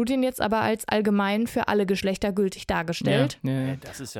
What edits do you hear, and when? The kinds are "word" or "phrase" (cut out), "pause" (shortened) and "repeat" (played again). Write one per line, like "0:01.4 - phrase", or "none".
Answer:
none